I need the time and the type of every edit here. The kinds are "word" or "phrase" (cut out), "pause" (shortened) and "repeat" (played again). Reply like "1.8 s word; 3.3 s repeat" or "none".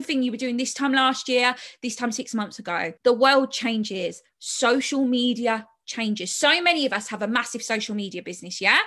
3.0 s pause